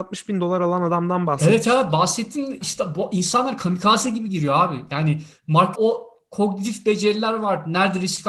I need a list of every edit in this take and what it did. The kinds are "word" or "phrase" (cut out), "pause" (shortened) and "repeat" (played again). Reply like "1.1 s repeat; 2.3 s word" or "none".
2.6 s word; 5.7 s word